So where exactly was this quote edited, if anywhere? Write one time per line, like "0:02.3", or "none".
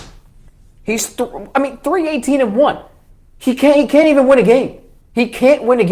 none